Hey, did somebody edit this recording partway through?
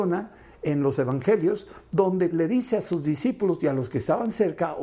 yes; 1 cut; at 2.3 s

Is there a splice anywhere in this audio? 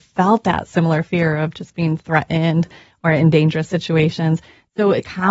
no; 0 cuts

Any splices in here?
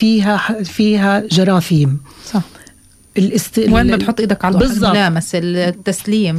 yes; 2 cuts; at 4.0 s, 4.5 s

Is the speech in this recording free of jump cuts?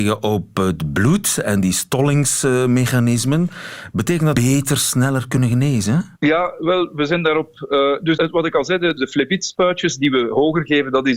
no; 4 cuts; at 4.3 s, 6.1 s, 8.2 s, 9.0 s

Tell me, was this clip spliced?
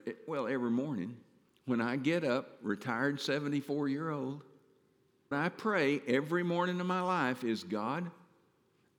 yes; 2 cuts; at 1.5 s, 5.3 s

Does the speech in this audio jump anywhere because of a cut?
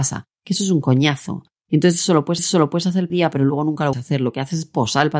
yes; 3 cuts; at 2.4 s, 3.1 s, 3.9 s

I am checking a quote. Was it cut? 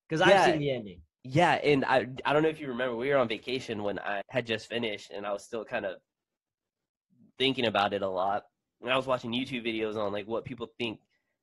yes; 1 cut; at 4.2 s

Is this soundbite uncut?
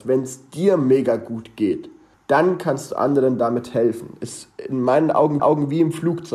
no; 2 cuts; at 2.1 s, 5.4 s

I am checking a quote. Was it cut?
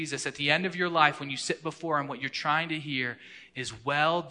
no; 0 cuts

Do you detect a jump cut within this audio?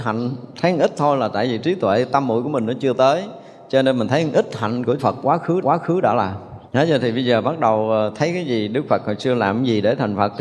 yes; 3 cuts; at 5.0 s, 5.6 s, 6.7 s

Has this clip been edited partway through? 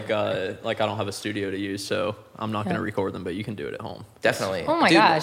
no; 0 cuts

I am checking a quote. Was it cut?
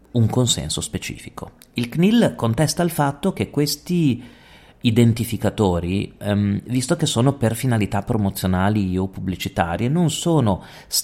no; 0 cuts

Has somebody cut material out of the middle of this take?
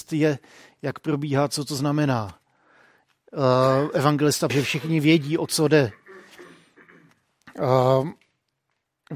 yes; 1 cut; at 4.5 s

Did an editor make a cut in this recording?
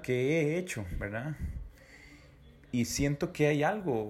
no; 0 cuts

